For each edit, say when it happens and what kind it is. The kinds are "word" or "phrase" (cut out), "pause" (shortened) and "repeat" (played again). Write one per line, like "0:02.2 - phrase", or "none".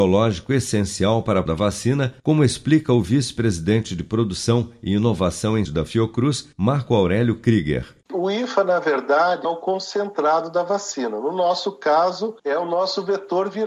0:01.5 - word
0:02.2 - pause
0:05.6 - word
0:06.5 - pause
0:08.0 - pause
0:09.4 - word
0:12.4 - pause